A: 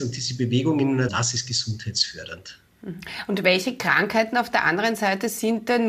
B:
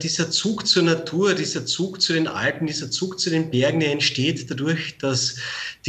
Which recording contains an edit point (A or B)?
A